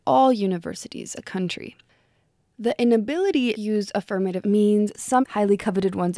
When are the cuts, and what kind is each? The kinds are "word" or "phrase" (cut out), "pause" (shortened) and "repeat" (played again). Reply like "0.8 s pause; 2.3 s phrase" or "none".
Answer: 1.2 s word; 3.6 s word; 4.4 s word; 5.2 s word